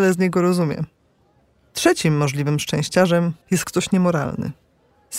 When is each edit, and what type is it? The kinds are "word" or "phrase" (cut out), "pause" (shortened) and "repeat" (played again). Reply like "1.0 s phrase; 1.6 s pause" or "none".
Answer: 3.4 s pause

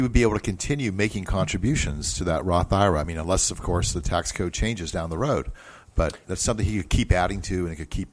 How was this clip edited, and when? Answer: none

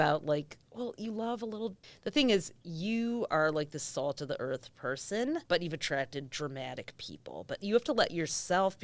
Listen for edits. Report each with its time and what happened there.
1.8 s pause; 5.5 s pause

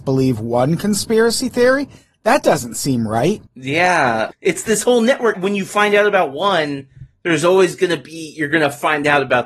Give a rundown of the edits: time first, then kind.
none

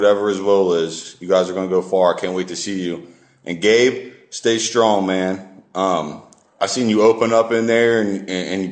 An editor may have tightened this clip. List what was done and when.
none

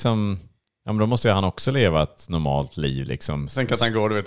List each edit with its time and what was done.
none

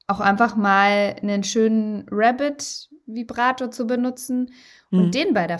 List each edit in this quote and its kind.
none

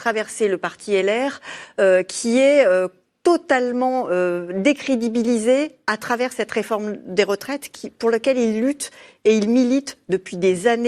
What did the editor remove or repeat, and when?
none

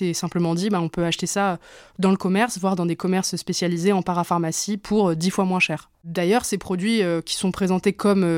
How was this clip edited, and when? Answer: none

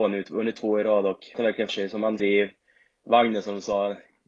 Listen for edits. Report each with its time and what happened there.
1.3 s word; 1.7 s word; 2.2 s word

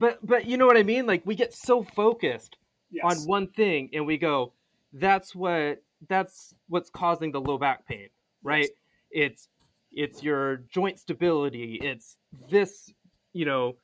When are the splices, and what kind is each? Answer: none

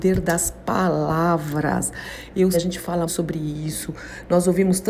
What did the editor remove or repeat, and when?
2.5 s word; 3.1 s word

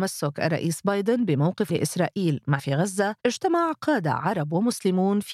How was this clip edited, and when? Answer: 1.7 s word; 2.6 s phrase; 3.2 s pause

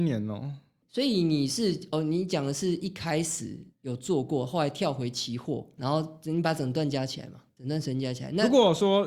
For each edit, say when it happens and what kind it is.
5.8 s word; 7.5 s word

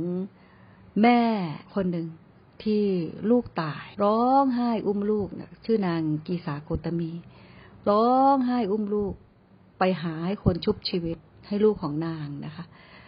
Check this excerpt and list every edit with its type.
1.6 s pause; 3.9 s pause

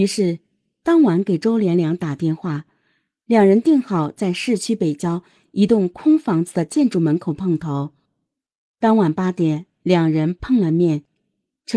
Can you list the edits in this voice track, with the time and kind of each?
none

